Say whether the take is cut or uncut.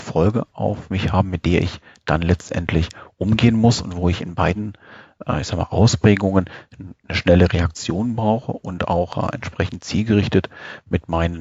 uncut